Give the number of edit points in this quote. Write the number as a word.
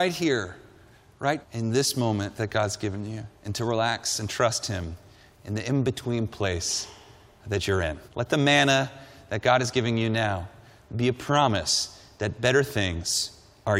three